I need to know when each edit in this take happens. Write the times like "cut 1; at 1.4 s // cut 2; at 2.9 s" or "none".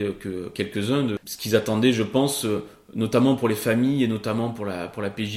cut 1; at 1.2 s